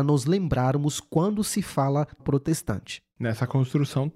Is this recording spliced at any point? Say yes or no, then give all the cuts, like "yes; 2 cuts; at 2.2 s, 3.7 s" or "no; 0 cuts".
yes; 1 cut; at 2.2 s